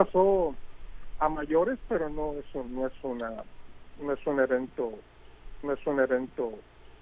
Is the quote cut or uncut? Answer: cut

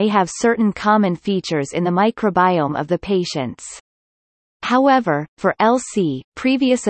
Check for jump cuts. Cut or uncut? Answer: uncut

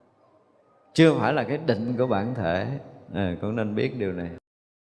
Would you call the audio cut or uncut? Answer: uncut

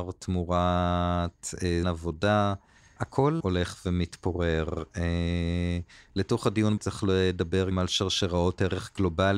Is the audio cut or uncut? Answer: cut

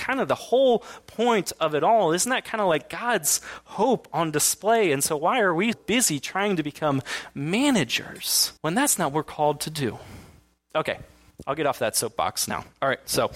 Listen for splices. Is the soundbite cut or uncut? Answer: cut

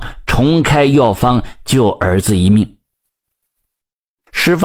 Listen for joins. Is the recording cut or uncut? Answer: uncut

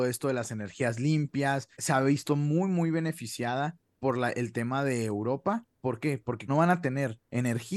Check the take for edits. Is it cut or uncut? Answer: cut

